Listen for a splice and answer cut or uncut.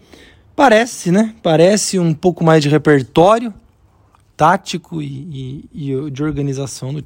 uncut